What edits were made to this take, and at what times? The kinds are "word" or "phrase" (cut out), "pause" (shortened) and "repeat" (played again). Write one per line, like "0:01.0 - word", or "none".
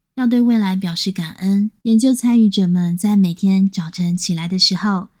0:01.8 - pause